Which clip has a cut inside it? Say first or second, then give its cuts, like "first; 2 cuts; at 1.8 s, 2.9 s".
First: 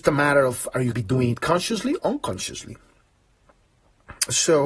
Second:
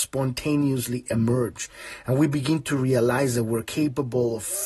first; 2 cuts; at 0.9 s, 2.0 s